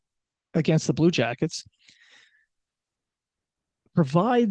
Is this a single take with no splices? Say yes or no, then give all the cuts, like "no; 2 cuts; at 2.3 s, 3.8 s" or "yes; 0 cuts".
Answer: yes; 0 cuts